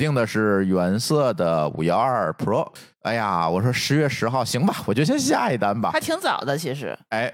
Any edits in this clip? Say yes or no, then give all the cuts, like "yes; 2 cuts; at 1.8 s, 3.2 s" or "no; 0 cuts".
yes; 1 cut; at 2.9 s